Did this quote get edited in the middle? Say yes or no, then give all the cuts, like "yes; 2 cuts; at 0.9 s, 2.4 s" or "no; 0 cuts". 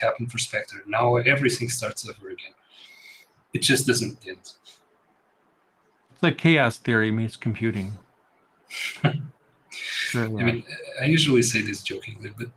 no; 0 cuts